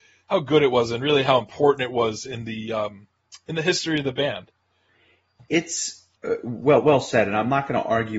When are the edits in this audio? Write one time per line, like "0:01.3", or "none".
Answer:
0:06.2